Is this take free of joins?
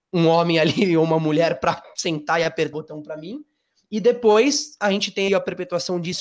no; 2 cuts; at 2.7 s, 5.3 s

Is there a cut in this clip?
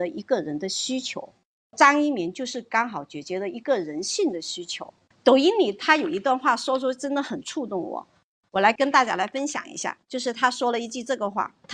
no; 0 cuts

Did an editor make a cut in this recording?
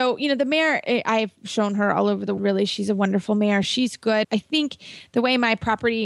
yes; 3 cuts; at 2.4 s, 3.6 s, 4.2 s

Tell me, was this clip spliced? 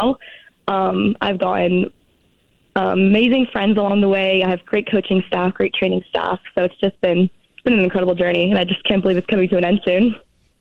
no; 0 cuts

